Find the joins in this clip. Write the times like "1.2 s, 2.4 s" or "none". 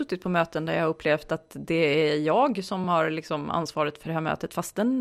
none

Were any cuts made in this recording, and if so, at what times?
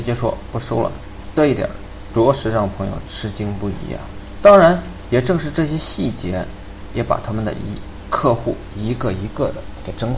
none

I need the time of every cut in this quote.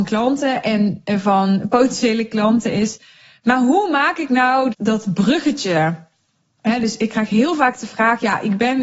4.7 s

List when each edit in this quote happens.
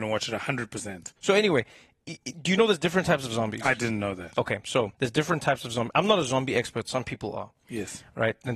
1.2 s, 4.9 s

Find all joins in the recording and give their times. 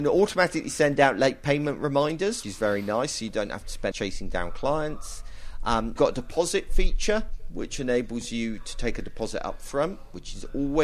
2.4 s, 3.9 s, 6.0 s

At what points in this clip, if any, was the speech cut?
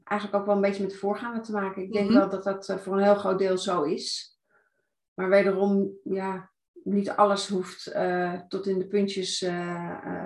none

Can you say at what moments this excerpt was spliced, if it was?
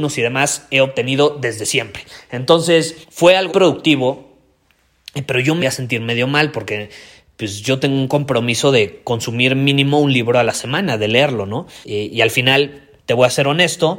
3.0 s, 3.5 s, 5.6 s, 11.8 s, 13.0 s

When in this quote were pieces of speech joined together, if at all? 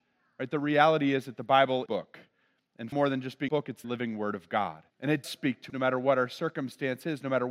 1.9 s, 2.9 s, 3.5 s, 3.8 s, 4.9 s, 5.2 s, 5.7 s

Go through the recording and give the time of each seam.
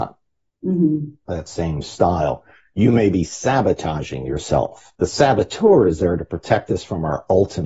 5.0 s

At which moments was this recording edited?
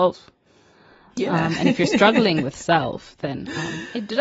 none

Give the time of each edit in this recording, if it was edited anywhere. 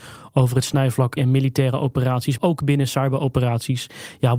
1.2 s, 2.4 s

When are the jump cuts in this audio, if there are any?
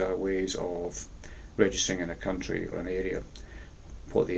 2.7 s

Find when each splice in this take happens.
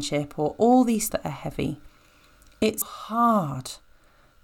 1.1 s, 2.8 s

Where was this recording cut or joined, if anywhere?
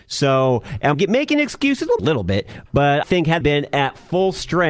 0.9 s, 2.0 s, 3.0 s, 3.4 s

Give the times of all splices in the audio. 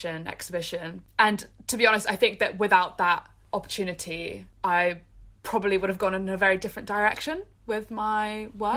1.1 s

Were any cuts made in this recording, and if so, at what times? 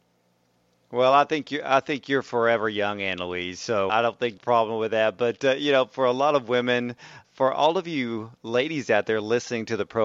3.9 s, 4.4 s, 7.2 s

